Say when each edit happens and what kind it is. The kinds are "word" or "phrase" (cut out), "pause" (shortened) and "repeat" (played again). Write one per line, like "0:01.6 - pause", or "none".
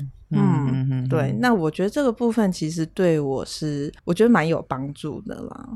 0:04.0 - pause